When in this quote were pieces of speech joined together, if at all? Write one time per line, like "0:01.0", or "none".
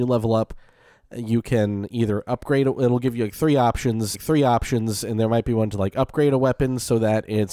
0:04.1